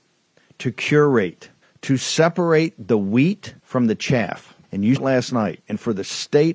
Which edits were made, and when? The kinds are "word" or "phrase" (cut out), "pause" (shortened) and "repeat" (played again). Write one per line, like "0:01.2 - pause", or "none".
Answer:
0:01.6 - pause
0:03.6 - pause
0:04.6 - pause
0:05.0 - word